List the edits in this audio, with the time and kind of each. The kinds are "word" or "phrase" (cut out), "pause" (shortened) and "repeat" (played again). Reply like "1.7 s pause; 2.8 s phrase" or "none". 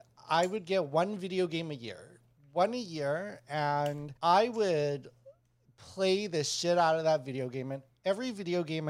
4.2 s pause